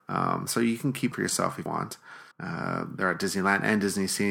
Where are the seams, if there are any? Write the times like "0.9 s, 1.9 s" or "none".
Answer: 1.1 s, 1.7 s, 2.3 s